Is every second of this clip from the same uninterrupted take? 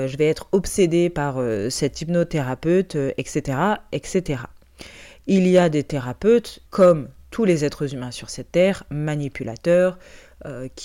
no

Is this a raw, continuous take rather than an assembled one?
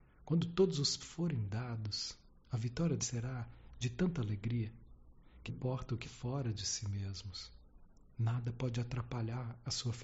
no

